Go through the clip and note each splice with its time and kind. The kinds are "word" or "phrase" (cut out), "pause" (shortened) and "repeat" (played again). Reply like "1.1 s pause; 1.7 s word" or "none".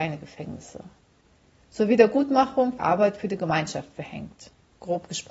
2.8 s word